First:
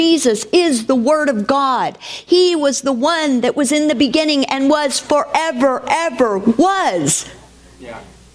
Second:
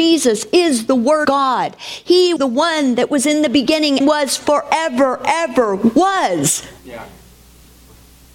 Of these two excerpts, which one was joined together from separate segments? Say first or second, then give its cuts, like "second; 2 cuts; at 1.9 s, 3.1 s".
second; 4 cuts; at 1.2 s, 2.4 s, 4.0 s, 6.8 s